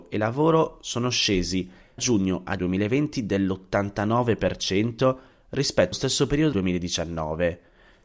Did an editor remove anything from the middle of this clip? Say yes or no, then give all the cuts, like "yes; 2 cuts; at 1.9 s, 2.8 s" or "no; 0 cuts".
yes; 4 cuts; at 2.0 s, 2.6 s, 5.9 s, 6.5 s